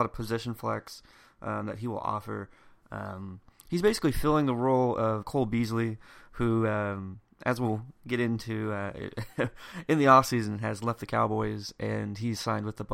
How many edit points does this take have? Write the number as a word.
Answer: one